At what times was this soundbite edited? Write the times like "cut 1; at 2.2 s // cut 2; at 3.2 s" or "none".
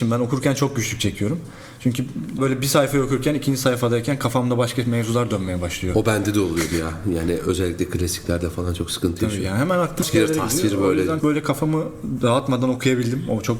cut 1; at 2.4 s // cut 2; at 10.0 s // cut 3; at 11.2 s